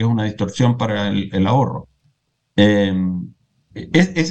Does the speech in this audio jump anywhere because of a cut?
no; 0 cuts

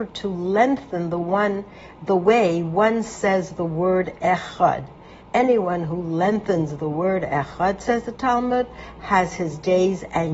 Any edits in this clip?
yes; 1 cut; at 5.2 s

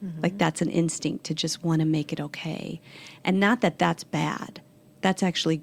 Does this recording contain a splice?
no; 0 cuts

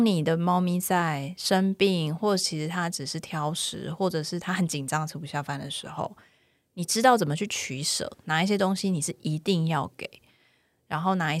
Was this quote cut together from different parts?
no; 0 cuts

